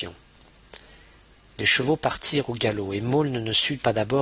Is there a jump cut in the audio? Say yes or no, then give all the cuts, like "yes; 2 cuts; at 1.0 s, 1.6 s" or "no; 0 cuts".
no; 0 cuts